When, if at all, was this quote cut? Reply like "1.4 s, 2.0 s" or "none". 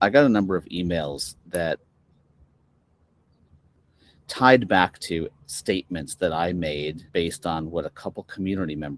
5.4 s, 7.1 s